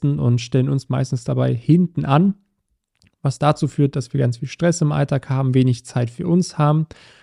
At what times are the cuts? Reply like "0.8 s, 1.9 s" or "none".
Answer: none